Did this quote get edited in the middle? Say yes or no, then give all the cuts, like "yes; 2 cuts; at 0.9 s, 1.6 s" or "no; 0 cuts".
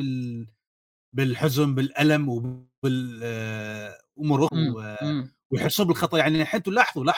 yes; 1 cut; at 4.5 s